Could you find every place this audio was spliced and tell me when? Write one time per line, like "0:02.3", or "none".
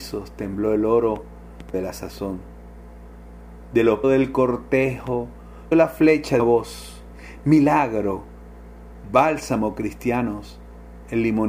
0:01.7
0:04.0
0:05.7
0:06.4
0:09.0